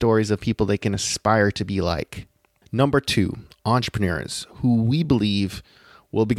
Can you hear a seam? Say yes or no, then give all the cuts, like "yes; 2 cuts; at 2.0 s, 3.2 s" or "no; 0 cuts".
no; 0 cuts